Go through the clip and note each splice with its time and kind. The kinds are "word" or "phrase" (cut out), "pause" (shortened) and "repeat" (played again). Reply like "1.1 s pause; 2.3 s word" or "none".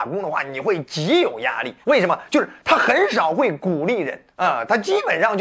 1.8 s pause